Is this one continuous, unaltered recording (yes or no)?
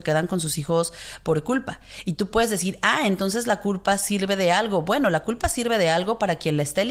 yes